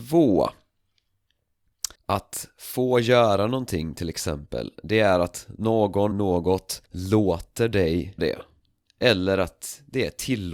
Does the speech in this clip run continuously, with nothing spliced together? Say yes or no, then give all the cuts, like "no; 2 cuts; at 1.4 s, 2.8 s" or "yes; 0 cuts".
no; 4 cuts; at 1.9 s, 6.1 s, 6.9 s, 8.2 s